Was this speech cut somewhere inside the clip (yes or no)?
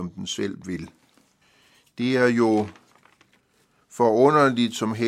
yes